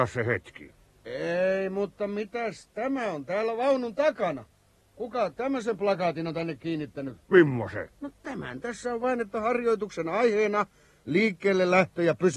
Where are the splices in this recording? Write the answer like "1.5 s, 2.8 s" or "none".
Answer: none